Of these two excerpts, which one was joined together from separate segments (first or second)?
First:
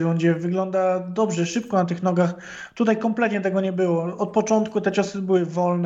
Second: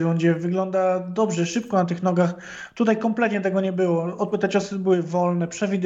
second